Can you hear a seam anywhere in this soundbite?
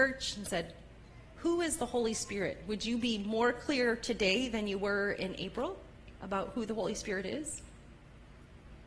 no; 0 cuts

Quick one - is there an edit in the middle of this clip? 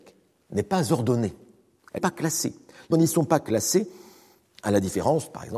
yes; 2 cuts; at 2.0 s, 2.9 s

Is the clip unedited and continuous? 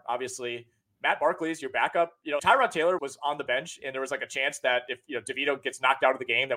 no; 2 cuts; at 2.4 s, 3.0 s

